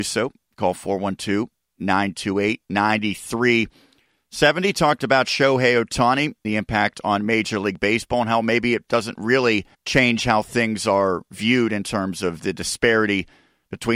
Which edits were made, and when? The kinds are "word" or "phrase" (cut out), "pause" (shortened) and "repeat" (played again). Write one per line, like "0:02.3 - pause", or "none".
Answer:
0:02.6 - pause
0:06.4 - phrase
0:09.7 - pause